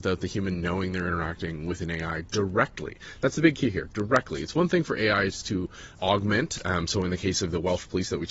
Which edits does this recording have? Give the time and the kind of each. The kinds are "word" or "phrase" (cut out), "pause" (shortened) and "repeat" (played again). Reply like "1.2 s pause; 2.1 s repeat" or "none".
5.9 s word